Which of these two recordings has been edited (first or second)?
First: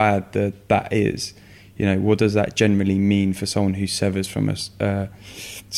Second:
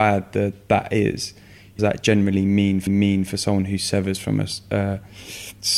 second